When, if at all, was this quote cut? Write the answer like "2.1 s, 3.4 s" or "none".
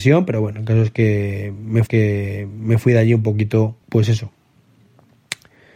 1.9 s, 3.8 s